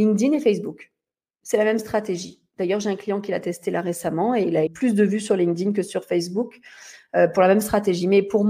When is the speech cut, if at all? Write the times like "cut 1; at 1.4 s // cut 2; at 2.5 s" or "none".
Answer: cut 1; at 4.7 s